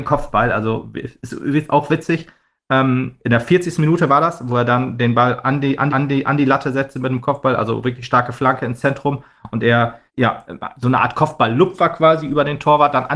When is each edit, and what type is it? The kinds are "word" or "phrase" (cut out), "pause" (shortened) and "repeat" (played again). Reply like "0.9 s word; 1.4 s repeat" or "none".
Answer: 5.9 s repeat; 10.1 s pause

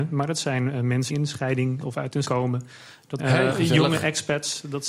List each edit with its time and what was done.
1.1 s word; 1.8 s word; 2.2 s word; 3.2 s word; 3.5 s word

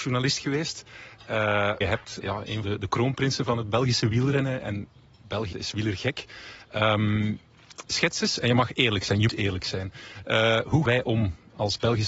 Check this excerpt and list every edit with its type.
1.8 s word; 2.2 s word; 2.6 s word; 5.5 s word; 9.3 s word; 10.9 s word

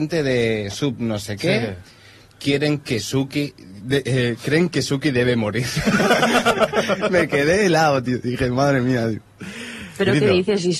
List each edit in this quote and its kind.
none

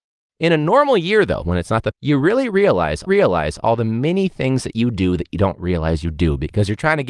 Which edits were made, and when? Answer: 1.9 s word; 3.1 s repeat

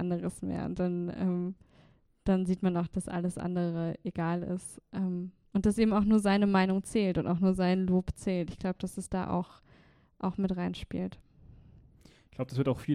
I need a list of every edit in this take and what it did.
none

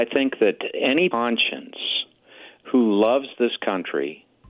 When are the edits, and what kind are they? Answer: 1.1 s phrase

